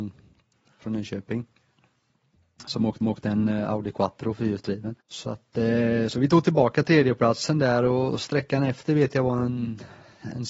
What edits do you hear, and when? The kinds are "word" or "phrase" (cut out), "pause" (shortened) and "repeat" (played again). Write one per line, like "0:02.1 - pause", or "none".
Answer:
0:03.0 - repeat
0:05.0 - pause